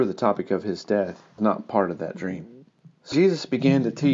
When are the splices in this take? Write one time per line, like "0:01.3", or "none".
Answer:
0:01.4
0:03.1